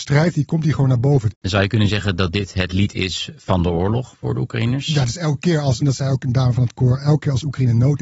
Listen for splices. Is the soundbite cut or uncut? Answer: cut